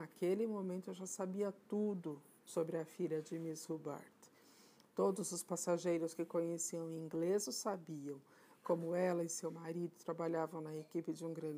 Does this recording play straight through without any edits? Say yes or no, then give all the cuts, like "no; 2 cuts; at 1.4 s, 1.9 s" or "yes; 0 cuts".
yes; 0 cuts